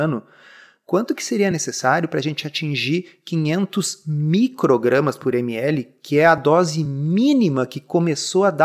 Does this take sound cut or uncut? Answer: uncut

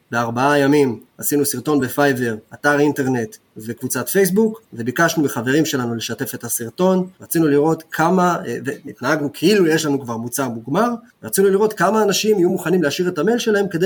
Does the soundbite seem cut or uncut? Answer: uncut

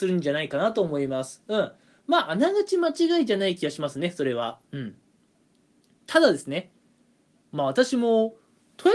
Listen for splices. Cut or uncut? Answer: uncut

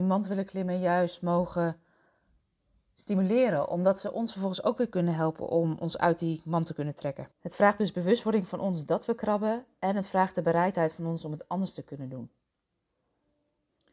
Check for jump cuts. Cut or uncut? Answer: cut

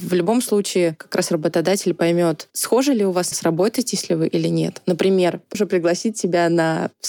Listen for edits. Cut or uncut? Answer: cut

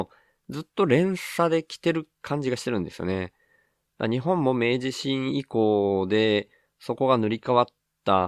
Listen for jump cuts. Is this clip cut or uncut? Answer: uncut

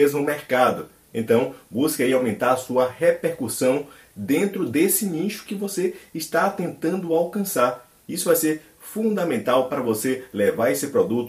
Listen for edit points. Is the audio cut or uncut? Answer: uncut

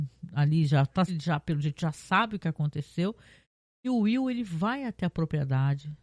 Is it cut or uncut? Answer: cut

